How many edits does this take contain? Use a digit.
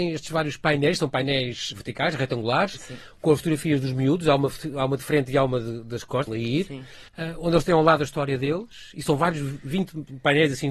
3